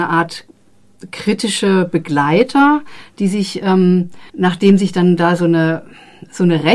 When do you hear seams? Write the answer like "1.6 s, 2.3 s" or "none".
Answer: 4.3 s